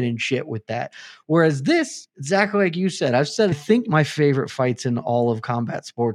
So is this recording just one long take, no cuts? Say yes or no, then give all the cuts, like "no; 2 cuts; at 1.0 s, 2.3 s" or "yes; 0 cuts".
no; 1 cut; at 3.5 s